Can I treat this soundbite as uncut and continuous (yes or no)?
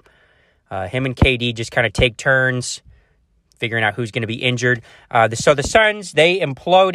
yes